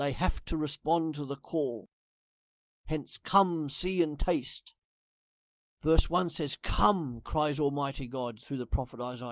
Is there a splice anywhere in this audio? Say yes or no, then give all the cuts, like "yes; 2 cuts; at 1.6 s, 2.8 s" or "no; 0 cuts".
no; 0 cuts